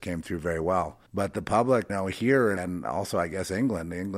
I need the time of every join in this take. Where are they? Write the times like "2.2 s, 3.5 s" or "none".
1.1 s, 1.9 s, 2.6 s